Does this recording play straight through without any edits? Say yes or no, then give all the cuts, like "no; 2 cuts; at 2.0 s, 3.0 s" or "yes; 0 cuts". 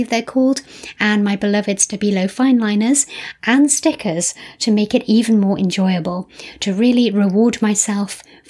yes; 0 cuts